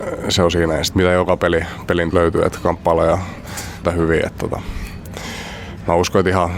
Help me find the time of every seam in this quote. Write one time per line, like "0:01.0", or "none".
0:00.9
0:02.1
0:03.8